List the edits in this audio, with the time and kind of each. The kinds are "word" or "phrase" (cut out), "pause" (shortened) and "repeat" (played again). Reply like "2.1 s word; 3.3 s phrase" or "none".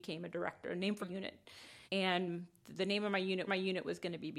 1.0 s word; 1.9 s pause; 3.5 s repeat